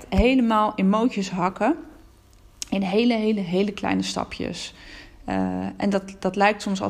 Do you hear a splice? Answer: no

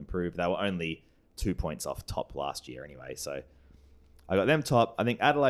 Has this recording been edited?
no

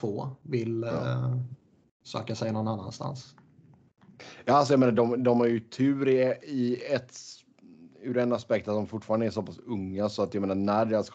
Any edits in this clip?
no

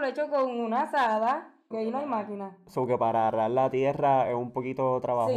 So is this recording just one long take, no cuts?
no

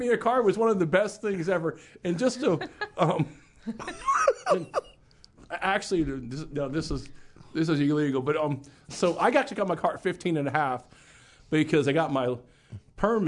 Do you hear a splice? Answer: no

